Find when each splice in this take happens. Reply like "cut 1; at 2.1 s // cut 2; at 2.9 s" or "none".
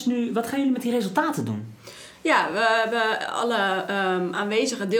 none